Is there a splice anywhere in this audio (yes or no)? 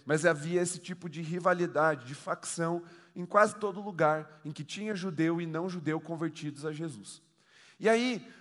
no